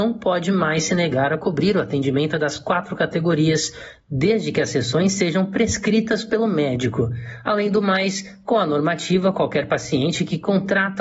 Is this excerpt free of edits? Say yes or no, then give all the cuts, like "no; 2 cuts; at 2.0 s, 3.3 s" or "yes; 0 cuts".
yes; 0 cuts